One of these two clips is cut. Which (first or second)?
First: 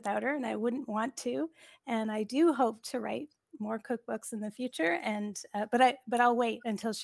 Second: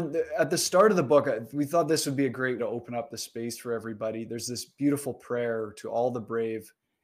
second